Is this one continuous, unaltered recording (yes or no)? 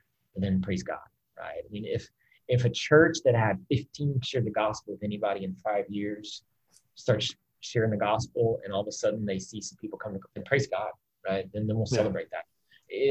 no